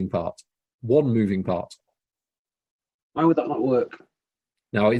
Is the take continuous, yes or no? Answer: yes